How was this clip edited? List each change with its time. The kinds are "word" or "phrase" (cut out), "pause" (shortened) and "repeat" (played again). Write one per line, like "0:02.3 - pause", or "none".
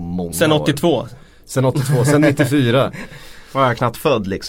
none